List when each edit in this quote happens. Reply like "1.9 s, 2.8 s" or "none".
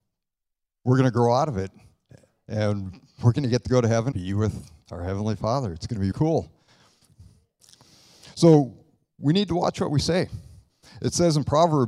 4.1 s, 6.1 s